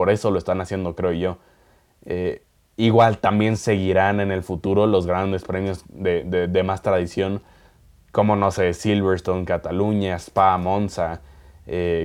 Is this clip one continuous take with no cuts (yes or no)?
yes